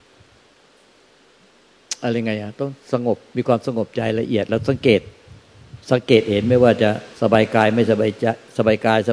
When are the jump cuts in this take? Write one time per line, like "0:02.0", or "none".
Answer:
0:05.8
0:07.1